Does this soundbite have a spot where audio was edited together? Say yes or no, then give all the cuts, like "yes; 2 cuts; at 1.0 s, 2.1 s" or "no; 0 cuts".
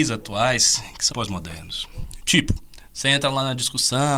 yes; 1 cut; at 1.1 s